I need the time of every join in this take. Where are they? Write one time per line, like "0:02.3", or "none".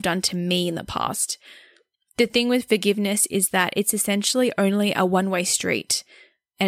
none